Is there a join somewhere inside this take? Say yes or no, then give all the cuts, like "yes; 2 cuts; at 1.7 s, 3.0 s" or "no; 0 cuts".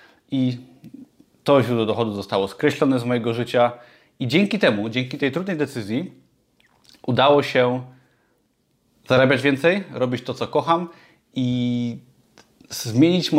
no; 0 cuts